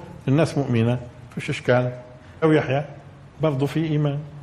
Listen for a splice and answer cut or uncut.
cut